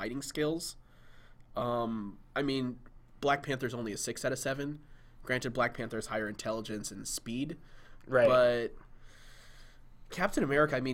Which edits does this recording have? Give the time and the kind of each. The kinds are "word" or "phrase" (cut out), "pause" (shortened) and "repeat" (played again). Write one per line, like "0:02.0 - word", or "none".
0:02.3 - pause